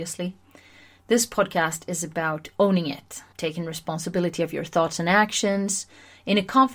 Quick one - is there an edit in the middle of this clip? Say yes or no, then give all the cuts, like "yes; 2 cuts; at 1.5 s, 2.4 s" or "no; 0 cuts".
yes; 1 cut; at 3.3 s